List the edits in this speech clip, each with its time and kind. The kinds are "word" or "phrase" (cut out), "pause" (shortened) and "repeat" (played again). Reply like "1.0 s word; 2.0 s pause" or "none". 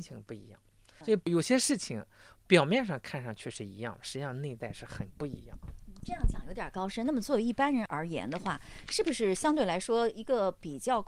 none

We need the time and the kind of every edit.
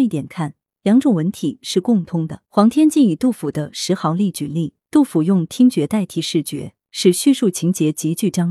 2.5 s pause; 4.8 s pause; 6.8 s pause

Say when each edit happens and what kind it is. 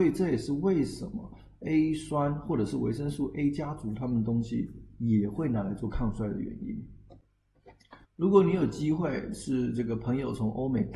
8.0 s pause

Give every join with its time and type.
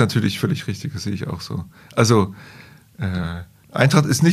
none

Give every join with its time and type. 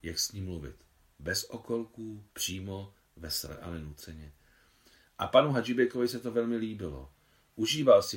2.3 s pause

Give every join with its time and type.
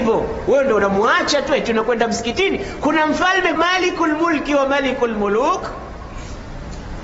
3.6 s word

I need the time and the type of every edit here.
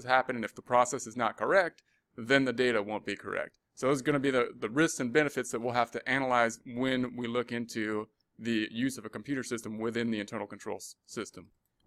3.6 s pause

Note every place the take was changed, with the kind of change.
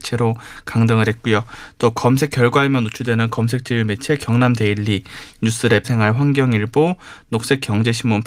5.8 s word

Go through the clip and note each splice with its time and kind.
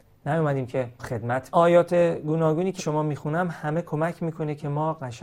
1.0 s phrase; 1.5 s phrase; 2.8 s word

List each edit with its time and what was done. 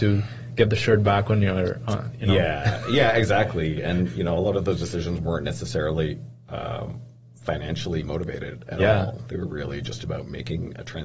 none

